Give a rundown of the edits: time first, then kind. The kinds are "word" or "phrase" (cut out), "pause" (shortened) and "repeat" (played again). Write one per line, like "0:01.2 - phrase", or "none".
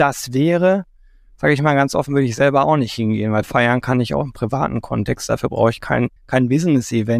0:06.2 - pause